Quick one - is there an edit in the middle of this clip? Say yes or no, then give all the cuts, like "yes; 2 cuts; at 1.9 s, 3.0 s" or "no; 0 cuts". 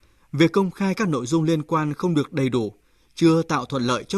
no; 0 cuts